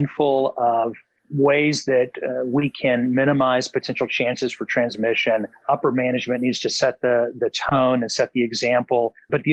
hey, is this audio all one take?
yes; 0 cuts

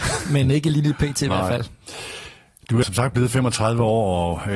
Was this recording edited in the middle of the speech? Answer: yes; 1 cut; at 2.8 s

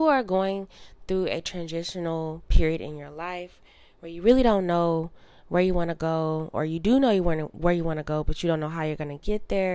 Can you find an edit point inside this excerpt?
no; 0 cuts

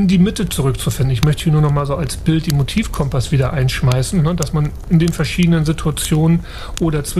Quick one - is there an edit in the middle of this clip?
no; 0 cuts

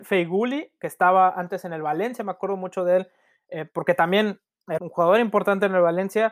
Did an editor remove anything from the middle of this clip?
yes; 1 cut; at 4.8 s

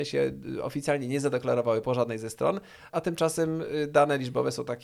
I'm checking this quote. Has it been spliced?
yes; 1 cut; at 2.9 s

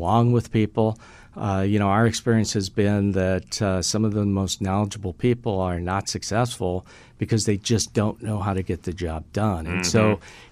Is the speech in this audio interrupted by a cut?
no; 0 cuts

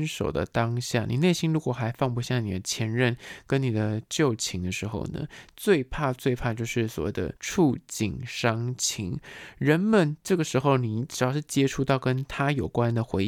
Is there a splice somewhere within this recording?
yes; 1 cut; at 7.4 s

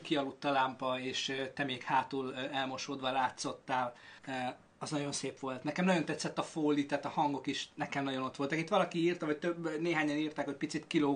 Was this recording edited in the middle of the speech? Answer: yes; 1 cut; at 4.2 s

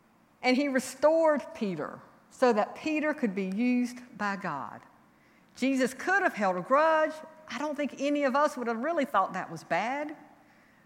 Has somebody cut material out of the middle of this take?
no; 0 cuts

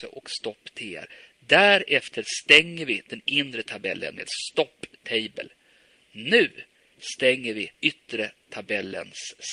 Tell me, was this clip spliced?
yes; 1 cut; at 7.7 s

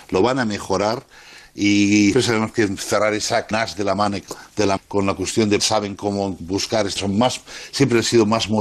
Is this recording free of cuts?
no; 5 cuts; at 2.1 s, 3.5 s, 4.8 s, 5.6 s, 7.0 s

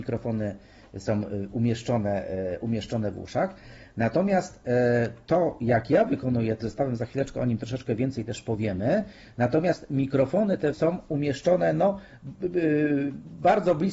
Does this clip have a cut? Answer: yes; 2 cuts; at 6.6 s, 10.7 s

